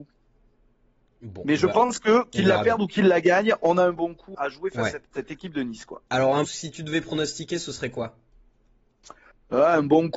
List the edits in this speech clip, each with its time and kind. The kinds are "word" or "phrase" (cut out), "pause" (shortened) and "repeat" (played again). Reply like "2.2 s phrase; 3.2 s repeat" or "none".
4.3 s word; 5.0 s word; 6.4 s phrase